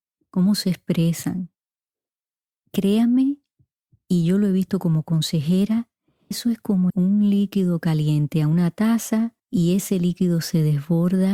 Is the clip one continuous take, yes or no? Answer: no